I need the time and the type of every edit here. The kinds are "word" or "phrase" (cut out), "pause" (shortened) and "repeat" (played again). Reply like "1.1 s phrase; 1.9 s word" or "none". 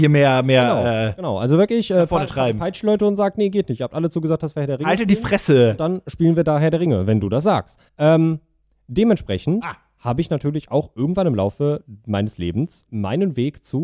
7.9 s pause; 12.9 s word